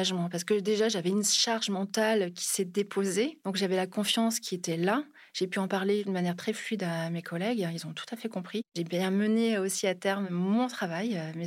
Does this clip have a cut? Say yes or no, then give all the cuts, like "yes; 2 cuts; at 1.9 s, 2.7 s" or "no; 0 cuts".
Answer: no; 0 cuts